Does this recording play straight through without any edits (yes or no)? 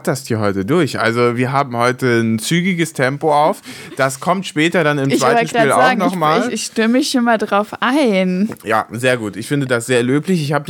yes